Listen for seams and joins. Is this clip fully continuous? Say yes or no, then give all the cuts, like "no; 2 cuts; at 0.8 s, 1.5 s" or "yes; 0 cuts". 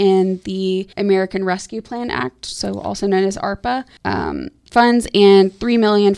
no; 2 cuts; at 0.9 s, 4.0 s